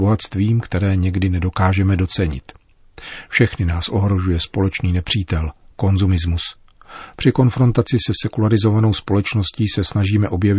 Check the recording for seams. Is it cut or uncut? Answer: uncut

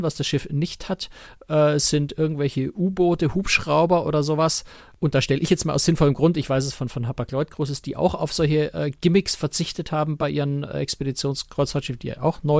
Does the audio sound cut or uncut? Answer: uncut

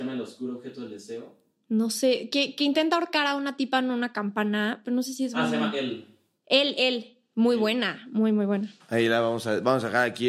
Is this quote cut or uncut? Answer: uncut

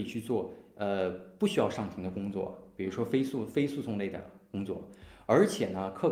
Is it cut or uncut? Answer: uncut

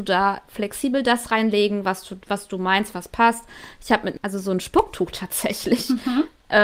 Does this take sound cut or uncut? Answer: cut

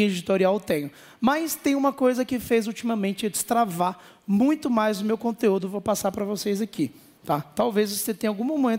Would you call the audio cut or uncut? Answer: uncut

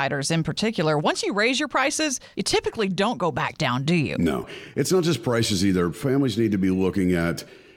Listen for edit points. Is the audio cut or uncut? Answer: cut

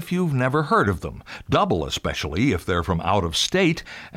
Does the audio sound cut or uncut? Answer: uncut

